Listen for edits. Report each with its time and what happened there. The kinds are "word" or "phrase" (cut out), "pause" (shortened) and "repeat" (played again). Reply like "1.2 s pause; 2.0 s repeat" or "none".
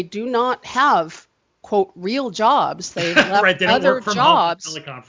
none